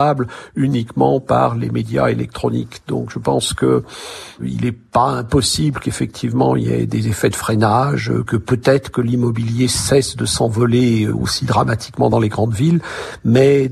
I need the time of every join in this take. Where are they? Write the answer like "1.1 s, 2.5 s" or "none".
none